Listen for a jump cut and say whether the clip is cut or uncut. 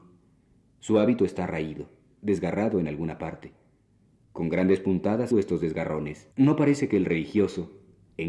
cut